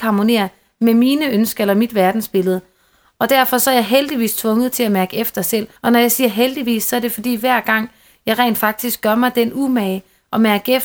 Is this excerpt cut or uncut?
cut